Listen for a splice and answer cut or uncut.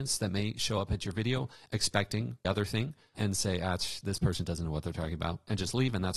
cut